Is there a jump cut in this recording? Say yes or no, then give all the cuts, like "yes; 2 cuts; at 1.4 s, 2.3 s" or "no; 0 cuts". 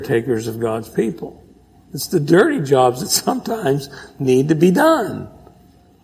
no; 0 cuts